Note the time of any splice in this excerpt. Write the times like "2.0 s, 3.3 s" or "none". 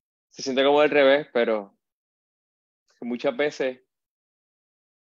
none